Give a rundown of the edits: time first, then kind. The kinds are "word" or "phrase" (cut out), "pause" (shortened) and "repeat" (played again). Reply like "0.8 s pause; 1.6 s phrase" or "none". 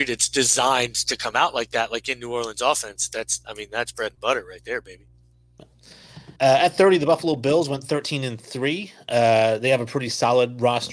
6.4 s pause